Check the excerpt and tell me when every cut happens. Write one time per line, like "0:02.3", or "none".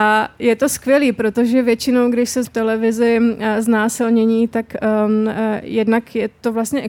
0:02.4